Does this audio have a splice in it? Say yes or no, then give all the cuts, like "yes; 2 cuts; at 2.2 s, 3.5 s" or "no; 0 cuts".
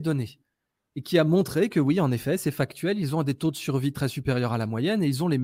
no; 0 cuts